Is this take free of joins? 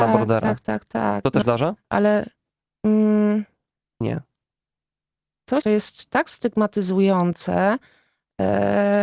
no; 3 cuts; at 1.4 s, 4.0 s, 5.6 s

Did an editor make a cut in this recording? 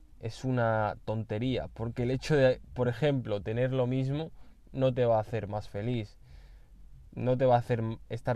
no; 0 cuts

